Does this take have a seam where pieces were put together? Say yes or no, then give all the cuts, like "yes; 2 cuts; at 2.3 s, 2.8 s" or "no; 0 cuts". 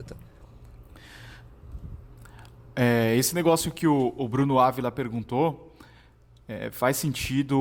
no; 0 cuts